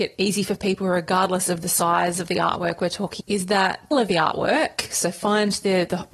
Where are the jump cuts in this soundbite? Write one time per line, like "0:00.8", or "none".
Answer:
0:03.2
0:03.9